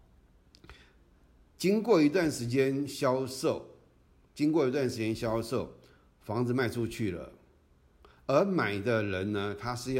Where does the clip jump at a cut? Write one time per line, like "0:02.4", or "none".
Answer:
none